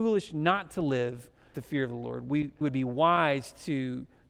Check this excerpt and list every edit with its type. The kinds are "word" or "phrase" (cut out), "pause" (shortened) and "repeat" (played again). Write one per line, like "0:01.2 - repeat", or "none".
0:01.5 - word
0:02.6 - phrase

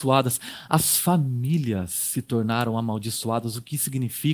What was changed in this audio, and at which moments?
none

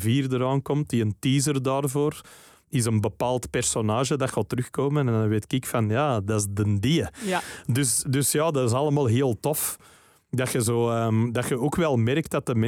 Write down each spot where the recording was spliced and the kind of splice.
none

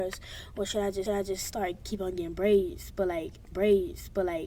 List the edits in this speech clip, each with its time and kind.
0:01.1 - repeat
0:03.5 - repeat

